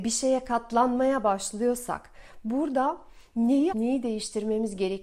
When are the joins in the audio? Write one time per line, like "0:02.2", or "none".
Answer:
0:03.7